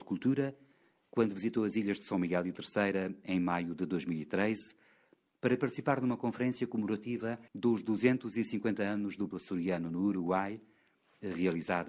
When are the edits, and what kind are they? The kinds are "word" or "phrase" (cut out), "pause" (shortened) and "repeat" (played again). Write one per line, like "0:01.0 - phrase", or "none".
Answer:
0:07.5 - pause
0:09.3 - word